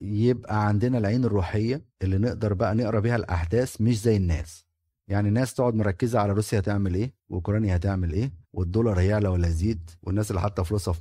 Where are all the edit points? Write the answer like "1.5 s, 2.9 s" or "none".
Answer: 1.9 s, 4.9 s, 7.2 s, 8.4 s, 10.0 s